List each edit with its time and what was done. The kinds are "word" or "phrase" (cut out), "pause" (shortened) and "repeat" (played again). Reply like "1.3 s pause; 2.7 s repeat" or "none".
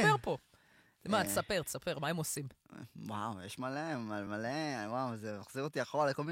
none

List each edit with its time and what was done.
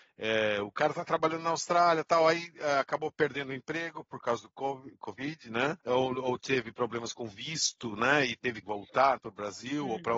5.8 s pause; 8.6 s word; 9.2 s word

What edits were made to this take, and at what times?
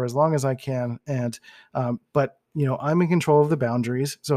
none

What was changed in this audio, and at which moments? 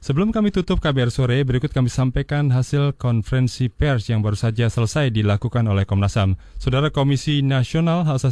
none

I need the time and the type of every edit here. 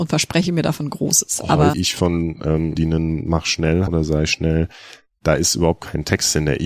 1.7 s phrase; 2.7 s phrase; 3.9 s word

